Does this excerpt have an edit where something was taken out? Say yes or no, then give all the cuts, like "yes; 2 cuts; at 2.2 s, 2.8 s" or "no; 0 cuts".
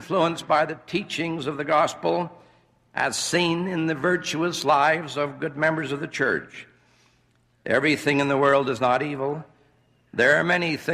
no; 0 cuts